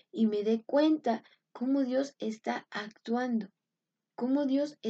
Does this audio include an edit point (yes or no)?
no